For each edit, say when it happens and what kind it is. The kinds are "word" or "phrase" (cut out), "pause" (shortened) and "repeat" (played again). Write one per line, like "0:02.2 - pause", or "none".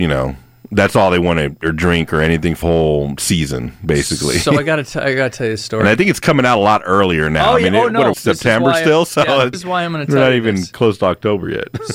0:01.6 - word
0:02.6 - word
0:08.1 - word
0:09.5 - word